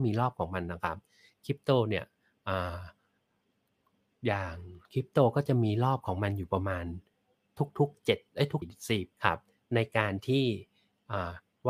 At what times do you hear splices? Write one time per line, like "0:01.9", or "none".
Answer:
0:04.8
0:08.6
0:09.1

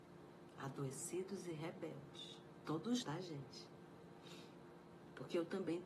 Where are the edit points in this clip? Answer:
0:03.0

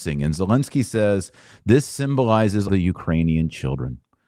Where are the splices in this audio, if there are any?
0:02.7

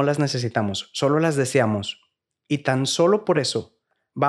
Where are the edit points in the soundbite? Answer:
none

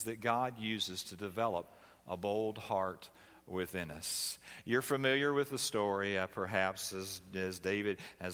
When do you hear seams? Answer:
none

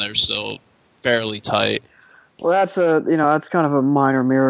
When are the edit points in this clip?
none

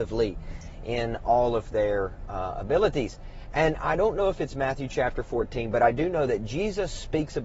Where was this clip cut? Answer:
none

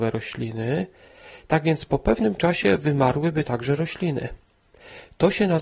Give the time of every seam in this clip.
none

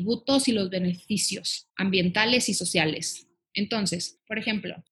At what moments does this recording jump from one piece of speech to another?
0:01.7

